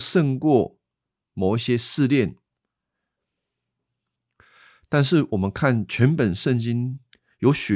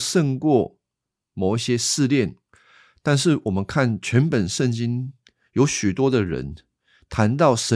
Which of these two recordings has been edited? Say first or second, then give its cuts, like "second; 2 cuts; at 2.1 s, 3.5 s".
second; 1 cut; at 2.5 s